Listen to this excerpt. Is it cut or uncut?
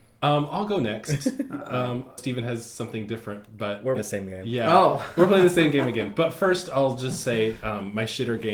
cut